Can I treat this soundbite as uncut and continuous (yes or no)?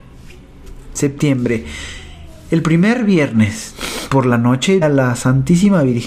no